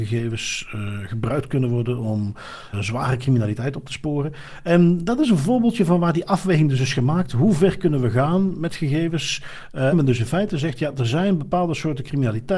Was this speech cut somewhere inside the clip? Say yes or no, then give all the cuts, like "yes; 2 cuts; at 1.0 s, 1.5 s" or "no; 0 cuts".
yes; 2 cuts; at 2.7 s, 9.9 s